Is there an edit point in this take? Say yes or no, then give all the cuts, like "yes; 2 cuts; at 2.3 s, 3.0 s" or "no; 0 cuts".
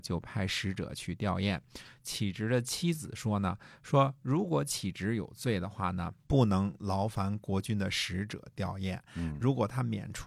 yes; 1 cut; at 6.2 s